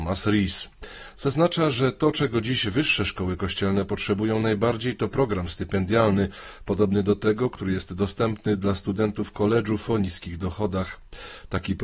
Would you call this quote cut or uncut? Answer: uncut